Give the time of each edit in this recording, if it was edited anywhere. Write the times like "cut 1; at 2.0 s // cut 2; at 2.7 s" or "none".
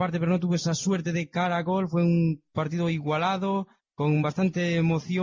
none